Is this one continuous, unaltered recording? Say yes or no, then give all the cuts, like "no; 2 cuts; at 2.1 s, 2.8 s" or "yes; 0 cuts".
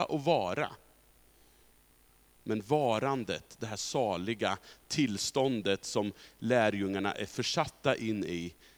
yes; 0 cuts